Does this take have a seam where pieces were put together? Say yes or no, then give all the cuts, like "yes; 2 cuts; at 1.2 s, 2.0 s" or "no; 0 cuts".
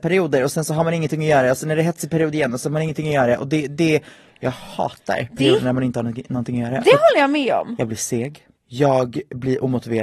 yes; 1 cut; at 8.6 s